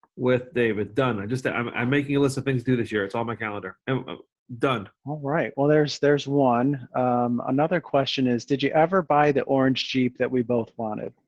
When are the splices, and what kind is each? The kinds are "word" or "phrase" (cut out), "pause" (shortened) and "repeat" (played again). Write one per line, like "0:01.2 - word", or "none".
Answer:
0:03.8 - pause
0:05.0 - pause